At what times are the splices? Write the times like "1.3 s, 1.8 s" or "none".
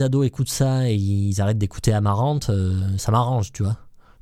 3.0 s